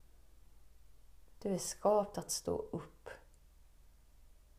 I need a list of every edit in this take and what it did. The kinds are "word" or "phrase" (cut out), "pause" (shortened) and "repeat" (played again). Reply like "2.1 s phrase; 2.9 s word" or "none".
none